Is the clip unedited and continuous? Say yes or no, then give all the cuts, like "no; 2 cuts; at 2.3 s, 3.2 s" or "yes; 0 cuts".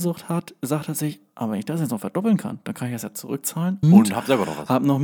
no; 1 cut; at 3.8 s